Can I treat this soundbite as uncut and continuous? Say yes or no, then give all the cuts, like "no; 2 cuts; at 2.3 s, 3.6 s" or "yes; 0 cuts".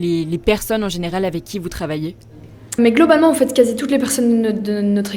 no; 1 cut; at 2.8 s